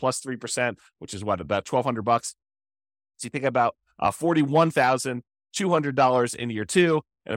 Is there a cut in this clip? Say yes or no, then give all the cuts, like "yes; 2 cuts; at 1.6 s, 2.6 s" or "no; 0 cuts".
no; 0 cuts